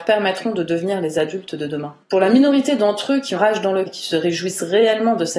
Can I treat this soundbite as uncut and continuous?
no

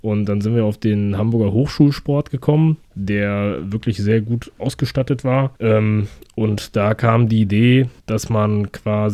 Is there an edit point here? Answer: yes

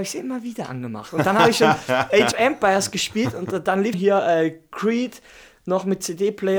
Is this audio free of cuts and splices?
no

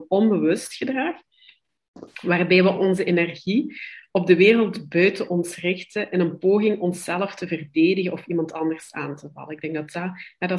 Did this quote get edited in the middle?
no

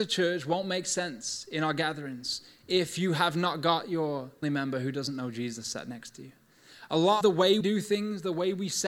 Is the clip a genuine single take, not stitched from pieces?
no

